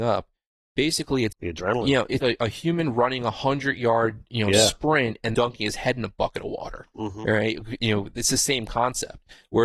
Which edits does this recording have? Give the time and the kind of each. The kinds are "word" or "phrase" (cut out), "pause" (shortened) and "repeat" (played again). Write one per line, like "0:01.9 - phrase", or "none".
0:01.3 - word
0:02.2 - word
0:05.3 - word

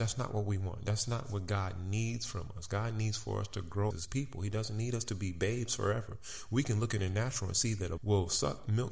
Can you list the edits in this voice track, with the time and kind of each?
0:03.9 - word
0:08.0 - word

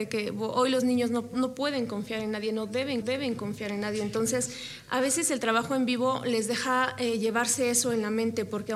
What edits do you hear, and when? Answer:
0:01.3 - word
0:03.0 - repeat

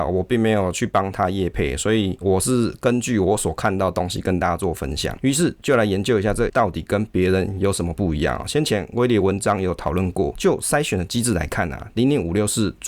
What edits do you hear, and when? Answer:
0:06.5 - word

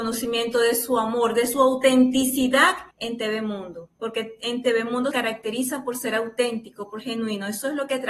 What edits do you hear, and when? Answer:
0:02.9 - pause
0:03.9 - pause
0:05.1 - word
0:07.0 - word

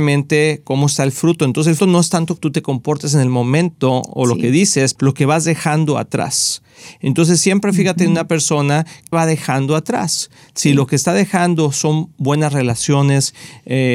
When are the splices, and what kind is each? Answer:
0:01.8 - word
0:02.4 - word
0:05.0 - word
0:09.1 - word

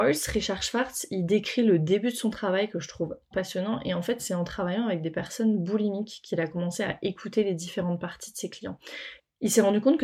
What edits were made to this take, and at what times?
0:03.3 - word
0:04.2 - word

